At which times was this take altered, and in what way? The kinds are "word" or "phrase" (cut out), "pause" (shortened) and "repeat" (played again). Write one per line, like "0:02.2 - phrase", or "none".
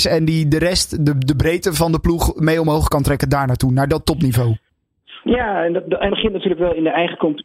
0:06.1 - word